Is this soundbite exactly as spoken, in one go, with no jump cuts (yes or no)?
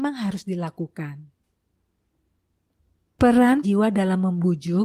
no